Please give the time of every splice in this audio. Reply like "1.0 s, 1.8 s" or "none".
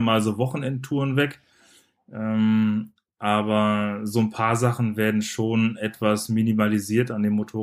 none